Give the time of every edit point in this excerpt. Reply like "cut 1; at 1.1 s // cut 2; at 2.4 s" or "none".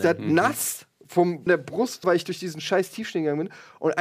cut 1; at 1.5 s // cut 2; at 2.0 s